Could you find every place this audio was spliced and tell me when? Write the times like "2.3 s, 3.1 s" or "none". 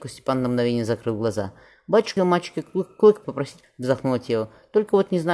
2.2 s, 3.2 s, 3.6 s